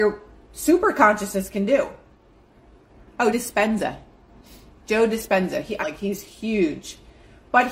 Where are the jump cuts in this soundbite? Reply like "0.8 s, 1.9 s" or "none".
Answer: 3.3 s, 5.8 s